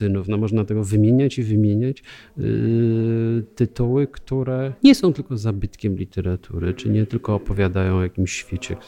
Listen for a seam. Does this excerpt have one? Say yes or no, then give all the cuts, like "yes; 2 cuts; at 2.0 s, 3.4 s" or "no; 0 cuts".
yes; 1 cut; at 4.8 s